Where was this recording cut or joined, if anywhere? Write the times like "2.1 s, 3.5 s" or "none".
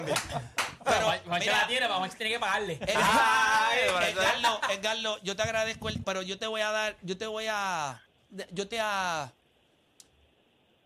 6.0 s, 8.7 s

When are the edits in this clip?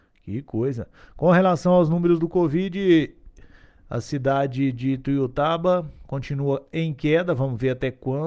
none

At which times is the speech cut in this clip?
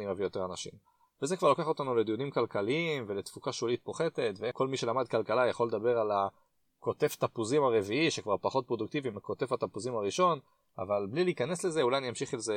none

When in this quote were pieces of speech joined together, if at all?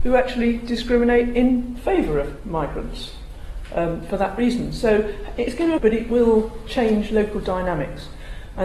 5.8 s

